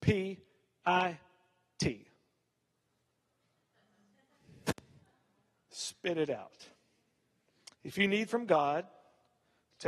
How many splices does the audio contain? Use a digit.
2